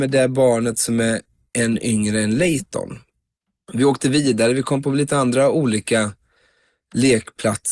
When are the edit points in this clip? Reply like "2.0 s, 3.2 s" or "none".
none